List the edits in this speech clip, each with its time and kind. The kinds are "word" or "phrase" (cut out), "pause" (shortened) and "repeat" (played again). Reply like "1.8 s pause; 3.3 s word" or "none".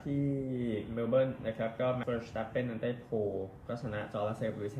2.0 s word